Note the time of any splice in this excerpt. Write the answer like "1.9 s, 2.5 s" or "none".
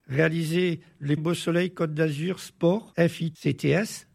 1.2 s